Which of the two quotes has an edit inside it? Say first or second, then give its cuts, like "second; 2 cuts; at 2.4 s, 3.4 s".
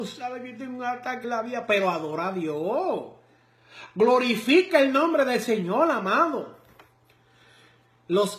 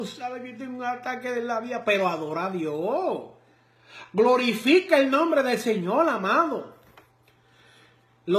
first; 1 cut; at 1.2 s